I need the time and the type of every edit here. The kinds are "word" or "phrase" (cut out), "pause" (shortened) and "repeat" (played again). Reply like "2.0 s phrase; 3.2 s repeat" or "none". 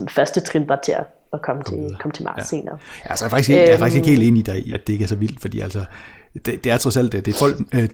none